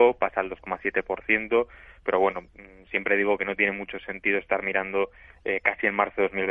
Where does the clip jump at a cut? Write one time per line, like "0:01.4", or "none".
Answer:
none

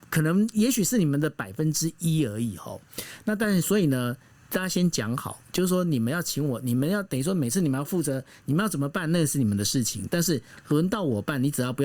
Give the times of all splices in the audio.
none

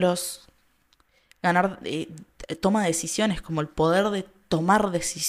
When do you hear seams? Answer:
none

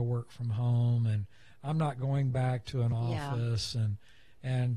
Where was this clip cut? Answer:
none

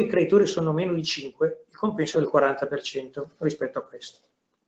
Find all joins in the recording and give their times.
0:02.1

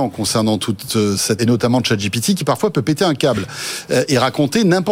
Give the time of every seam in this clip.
0:01.4

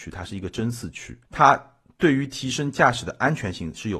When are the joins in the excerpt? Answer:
0:01.3

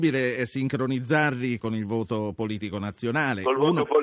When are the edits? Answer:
0:01.6

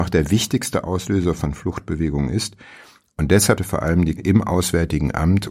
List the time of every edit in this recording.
0:03.6
0:04.2

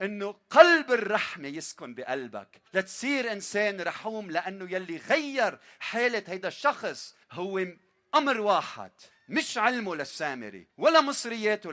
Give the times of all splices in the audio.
0:02.7
0:07.2
0:09.1
0:10.7

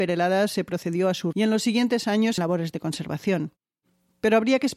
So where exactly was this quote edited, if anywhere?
0:01.3
0:02.4

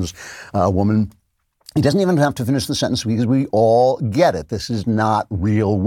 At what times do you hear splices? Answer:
none

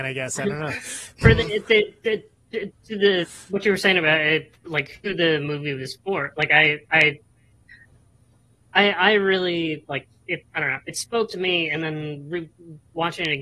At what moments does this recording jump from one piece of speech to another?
0:10.5

